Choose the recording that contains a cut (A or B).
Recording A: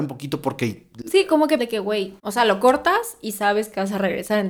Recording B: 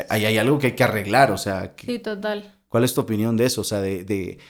A